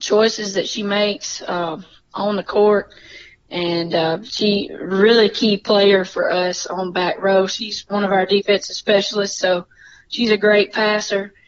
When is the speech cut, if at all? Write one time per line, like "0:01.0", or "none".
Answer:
none